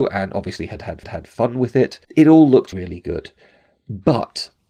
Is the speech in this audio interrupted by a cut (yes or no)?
yes